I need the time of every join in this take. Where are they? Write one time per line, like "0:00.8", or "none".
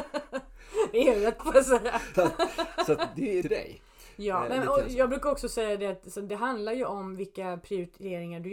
0:01.4
0:02.1
0:03.4